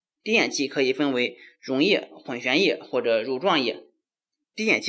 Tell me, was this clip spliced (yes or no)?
no